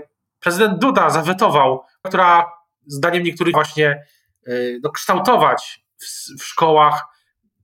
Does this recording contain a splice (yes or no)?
yes